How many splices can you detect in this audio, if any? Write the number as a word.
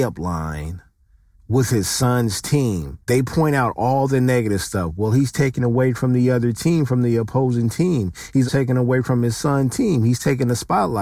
three